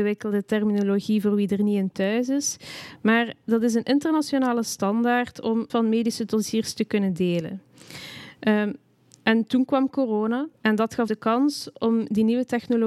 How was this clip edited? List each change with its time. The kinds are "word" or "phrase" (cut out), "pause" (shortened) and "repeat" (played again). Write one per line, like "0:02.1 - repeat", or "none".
0:05.7 - word
0:10.5 - pause
0:11.1 - word